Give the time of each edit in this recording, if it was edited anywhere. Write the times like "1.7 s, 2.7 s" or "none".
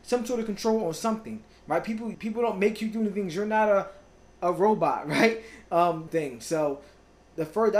2.1 s, 6.1 s